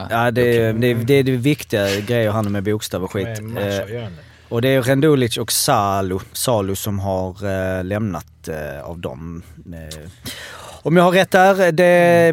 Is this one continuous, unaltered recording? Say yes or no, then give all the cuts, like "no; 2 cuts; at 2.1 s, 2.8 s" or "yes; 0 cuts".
yes; 0 cuts